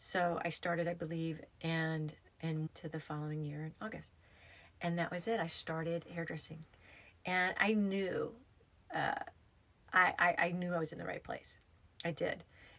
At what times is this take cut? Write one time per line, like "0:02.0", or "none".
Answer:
0:01.5
0:02.7